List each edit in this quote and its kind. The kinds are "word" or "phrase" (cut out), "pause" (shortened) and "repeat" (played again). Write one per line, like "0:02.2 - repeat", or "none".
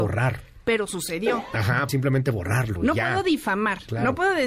0:01.9 - phrase